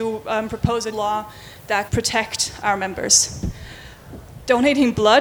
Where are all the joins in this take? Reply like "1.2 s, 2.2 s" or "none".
0.9 s, 1.9 s, 2.6 s